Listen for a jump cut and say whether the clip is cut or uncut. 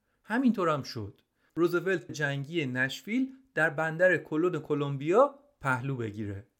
cut